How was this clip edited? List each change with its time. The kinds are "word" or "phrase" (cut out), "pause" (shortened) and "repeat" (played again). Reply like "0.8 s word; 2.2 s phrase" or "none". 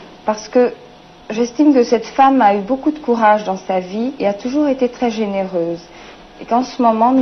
none